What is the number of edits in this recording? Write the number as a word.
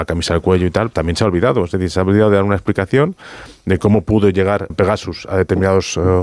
two